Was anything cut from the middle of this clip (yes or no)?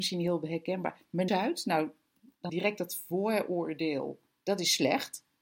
yes